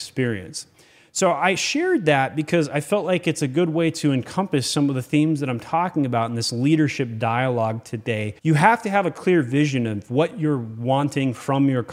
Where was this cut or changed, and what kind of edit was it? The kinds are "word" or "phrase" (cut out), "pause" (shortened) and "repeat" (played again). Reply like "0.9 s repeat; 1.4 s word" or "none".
8.4 s pause